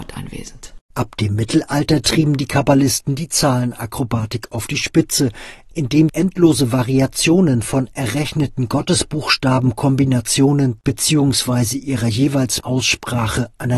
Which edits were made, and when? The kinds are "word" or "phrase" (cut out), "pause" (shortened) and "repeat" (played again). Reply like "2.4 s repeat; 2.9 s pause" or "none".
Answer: 6.1 s word; 12.6 s word